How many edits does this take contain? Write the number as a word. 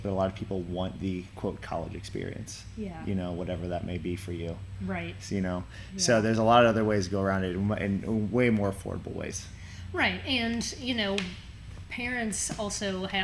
zero